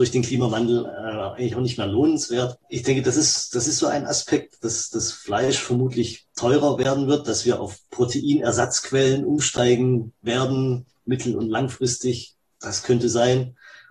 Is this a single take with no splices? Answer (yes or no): yes